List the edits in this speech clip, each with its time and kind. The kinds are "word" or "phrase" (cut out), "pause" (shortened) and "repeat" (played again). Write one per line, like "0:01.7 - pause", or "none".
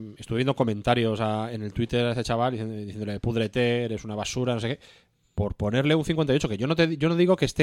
none

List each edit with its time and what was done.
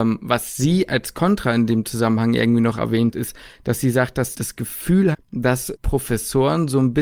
0:03.1 - word
0:04.3 - word
0:05.1 - word
0:05.8 - word

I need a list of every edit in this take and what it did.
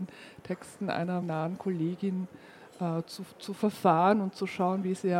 0:01.2 - word

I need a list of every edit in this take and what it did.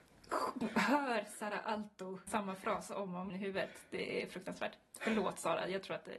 0:02.3 - word
0:03.3 - word

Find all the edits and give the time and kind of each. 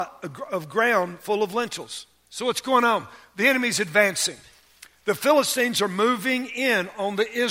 none

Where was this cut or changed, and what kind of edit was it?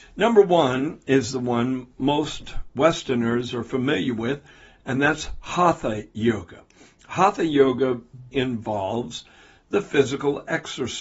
0:08.3 - word

